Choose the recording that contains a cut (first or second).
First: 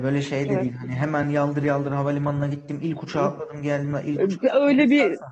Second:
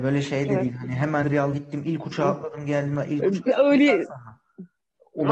second